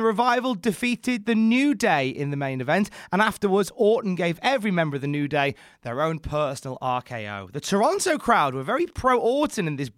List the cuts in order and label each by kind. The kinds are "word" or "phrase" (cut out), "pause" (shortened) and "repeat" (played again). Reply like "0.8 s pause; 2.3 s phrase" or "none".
none